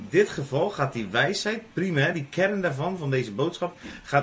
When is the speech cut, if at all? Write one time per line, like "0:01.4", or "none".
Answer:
none